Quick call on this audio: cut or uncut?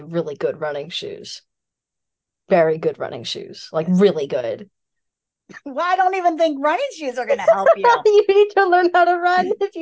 uncut